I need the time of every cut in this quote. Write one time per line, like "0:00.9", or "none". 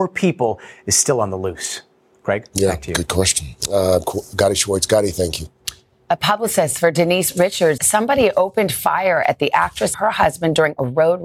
0:04.0
0:07.8
0:09.9